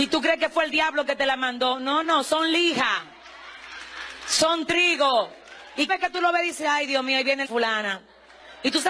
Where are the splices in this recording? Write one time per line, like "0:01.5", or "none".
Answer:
0:02.0
0:05.9
0:07.4